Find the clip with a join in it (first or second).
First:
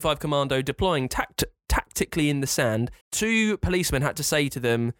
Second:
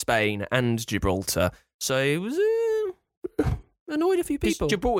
first